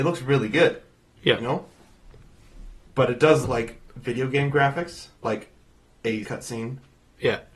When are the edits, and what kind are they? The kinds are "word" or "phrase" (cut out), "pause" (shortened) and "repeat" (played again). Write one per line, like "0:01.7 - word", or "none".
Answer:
0:03.4 - word
0:05.1 - pause
0:06.2 - word